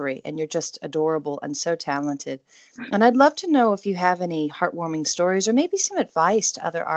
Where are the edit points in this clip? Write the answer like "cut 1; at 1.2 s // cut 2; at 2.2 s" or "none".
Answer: none